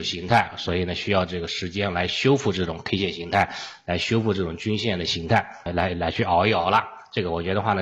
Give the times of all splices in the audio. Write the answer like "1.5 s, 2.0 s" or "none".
5.7 s

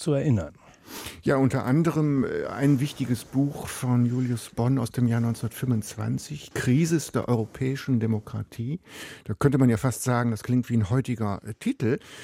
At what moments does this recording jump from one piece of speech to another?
6.5 s

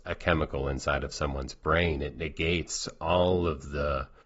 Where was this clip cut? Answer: none

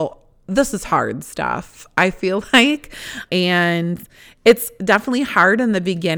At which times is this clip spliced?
3.3 s

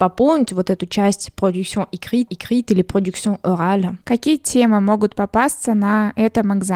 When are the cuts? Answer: 2.3 s, 4.0 s

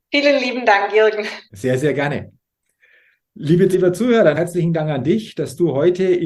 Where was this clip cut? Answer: 1.5 s, 3.7 s, 4.3 s

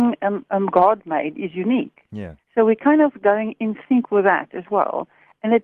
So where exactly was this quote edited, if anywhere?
2.4 s

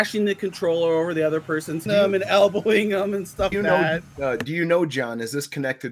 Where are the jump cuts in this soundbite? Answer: 1.9 s, 3.5 s, 4.1 s

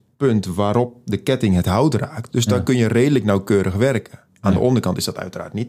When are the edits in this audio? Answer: none

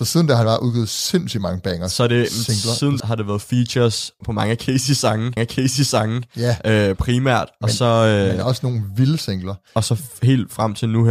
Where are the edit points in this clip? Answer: 3.0 s, 4.2 s, 5.4 s

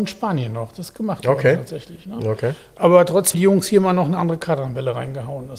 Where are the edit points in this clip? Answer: 3.3 s

